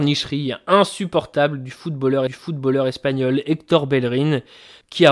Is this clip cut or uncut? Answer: cut